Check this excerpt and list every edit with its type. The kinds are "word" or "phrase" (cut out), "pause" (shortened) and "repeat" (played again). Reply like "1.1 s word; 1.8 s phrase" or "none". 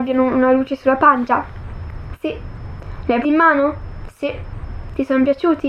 3.2 s word